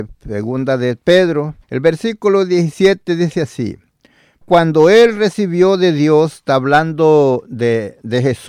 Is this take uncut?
no; 2 cuts; at 1.6 s, 4.4 s

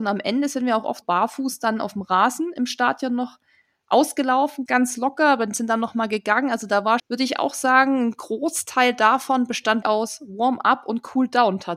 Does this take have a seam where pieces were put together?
yes; 4 cuts; at 1.0 s, 4.7 s, 7.0 s, 9.8 s

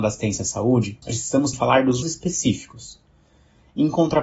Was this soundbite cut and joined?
yes; 3 cuts; at 1.0 s, 1.5 s, 2.0 s

